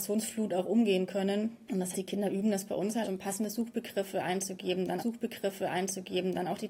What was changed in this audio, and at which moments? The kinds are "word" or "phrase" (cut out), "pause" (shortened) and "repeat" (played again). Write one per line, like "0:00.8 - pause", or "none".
0:01.9 - word
0:03.0 - word
0:05.0 - repeat